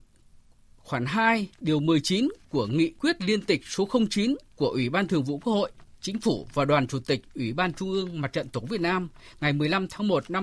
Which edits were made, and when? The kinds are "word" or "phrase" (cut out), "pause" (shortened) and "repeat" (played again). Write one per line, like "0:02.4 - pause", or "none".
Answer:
0:01.5 - pause
0:04.5 - pause